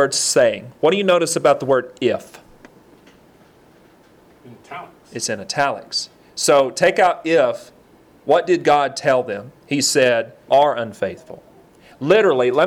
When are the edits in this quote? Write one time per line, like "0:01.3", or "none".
0:10.5